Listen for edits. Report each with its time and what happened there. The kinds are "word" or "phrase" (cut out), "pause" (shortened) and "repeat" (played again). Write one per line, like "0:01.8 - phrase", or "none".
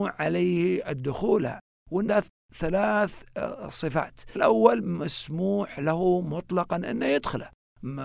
0:02.1 - word
0:04.4 - word